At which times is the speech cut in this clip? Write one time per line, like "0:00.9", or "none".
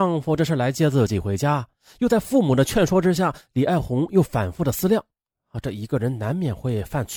none